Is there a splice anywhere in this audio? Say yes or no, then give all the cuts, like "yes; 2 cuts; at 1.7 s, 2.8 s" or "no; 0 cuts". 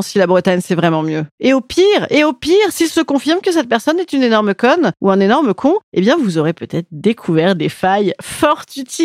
no; 0 cuts